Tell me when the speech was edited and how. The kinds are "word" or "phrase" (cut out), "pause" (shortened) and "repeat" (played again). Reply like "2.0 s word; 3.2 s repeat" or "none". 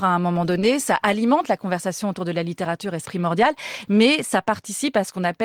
3.0 s word